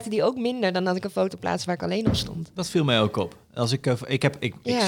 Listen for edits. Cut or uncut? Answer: uncut